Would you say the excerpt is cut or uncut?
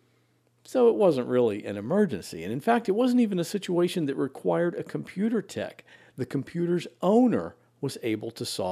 uncut